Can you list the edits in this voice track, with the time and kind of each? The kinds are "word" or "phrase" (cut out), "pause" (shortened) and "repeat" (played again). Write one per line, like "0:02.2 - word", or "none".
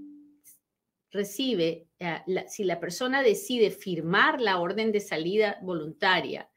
none